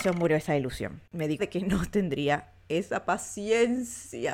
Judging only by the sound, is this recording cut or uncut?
cut